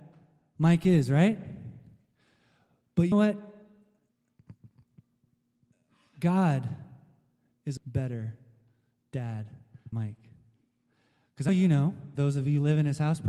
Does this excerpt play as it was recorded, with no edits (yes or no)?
no